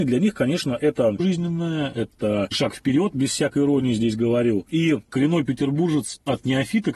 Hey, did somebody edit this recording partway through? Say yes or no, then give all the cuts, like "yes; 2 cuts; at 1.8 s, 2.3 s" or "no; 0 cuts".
yes; 2 cuts; at 1.2 s, 2.5 s